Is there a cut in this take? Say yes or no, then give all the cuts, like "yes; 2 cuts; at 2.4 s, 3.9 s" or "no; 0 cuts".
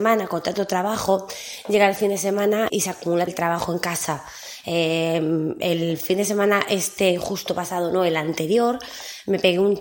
yes; 2 cuts; at 2.7 s, 3.3 s